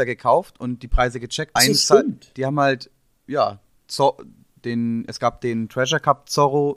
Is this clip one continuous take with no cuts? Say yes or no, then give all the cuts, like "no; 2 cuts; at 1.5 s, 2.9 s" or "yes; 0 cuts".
no; 1 cut; at 1.6 s